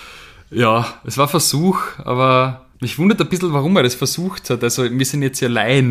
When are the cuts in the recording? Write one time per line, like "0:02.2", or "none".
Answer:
0:02.7